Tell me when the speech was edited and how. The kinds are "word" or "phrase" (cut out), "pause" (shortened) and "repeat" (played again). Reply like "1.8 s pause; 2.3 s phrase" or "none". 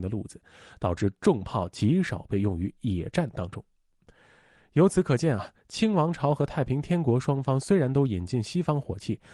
none